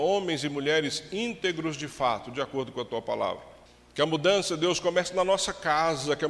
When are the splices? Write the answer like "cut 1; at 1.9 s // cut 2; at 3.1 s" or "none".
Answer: cut 1; at 3.7 s